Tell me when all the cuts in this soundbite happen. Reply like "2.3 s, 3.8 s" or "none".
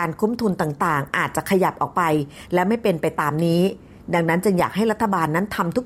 none